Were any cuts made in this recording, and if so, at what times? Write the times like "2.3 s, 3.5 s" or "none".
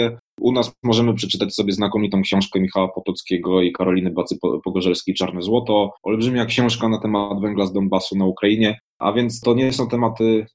6.0 s